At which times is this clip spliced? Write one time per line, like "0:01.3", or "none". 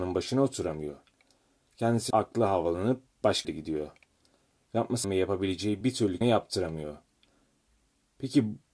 0:02.1
0:03.4
0:05.0
0:05.8
0:06.2